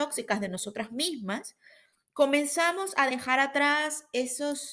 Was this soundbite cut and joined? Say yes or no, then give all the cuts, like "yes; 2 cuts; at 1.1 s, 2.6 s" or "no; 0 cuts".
no; 0 cuts